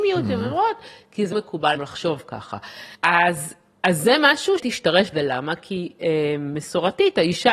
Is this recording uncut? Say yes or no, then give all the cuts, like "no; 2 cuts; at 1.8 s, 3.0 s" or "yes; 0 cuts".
no; 5 cuts; at 1.3 s, 1.7 s, 2.9 s, 4.6 s, 5.1 s